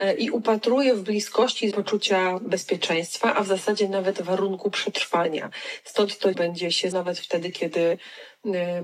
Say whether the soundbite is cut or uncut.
cut